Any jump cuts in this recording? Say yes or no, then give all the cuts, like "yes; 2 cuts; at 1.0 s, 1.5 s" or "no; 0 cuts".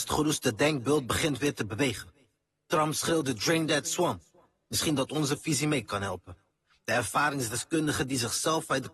no; 0 cuts